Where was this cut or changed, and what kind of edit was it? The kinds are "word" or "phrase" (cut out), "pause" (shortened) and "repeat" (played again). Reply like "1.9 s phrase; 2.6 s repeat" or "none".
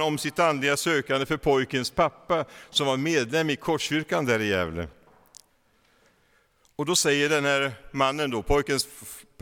none